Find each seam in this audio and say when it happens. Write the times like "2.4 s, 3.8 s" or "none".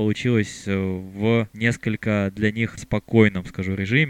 1.5 s, 2.8 s